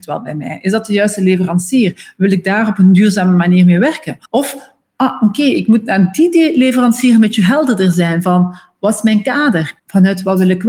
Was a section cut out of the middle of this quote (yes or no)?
yes